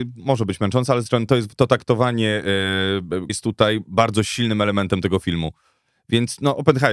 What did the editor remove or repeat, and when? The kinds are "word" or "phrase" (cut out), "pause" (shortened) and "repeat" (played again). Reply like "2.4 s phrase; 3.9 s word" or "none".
1.1 s word; 3.3 s word